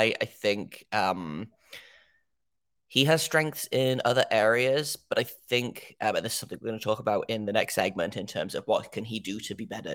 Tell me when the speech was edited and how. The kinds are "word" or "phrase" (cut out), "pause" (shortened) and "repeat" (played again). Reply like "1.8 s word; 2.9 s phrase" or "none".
none